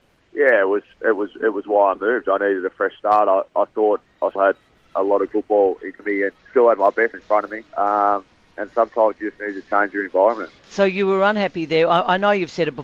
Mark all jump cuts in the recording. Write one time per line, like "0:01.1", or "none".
0:00.9
0:04.3
0:05.3
0:06.0
0:06.4
0:07.1
0:07.7
0:10.6